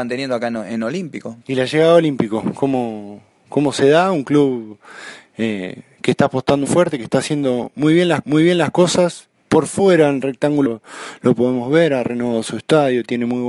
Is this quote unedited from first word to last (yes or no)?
no